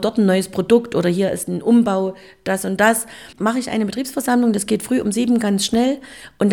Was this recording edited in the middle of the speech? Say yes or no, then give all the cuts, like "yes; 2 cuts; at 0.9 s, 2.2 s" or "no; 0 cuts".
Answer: no; 0 cuts